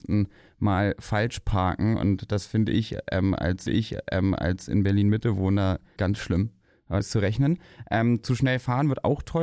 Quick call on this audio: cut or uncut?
cut